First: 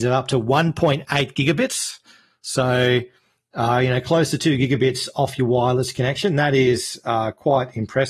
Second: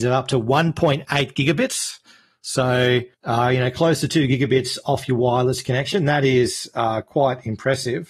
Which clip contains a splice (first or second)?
second